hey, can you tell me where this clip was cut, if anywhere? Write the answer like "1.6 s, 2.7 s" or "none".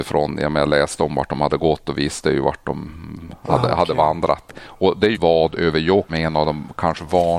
5.1 s, 6.1 s

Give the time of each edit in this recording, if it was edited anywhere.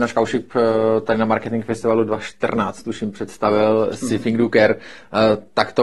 none

